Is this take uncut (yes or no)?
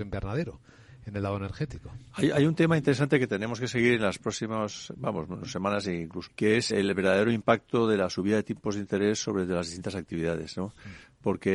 no